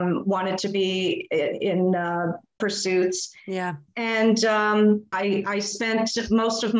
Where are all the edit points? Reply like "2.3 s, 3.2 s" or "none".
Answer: 2.6 s, 3.9 s, 5.1 s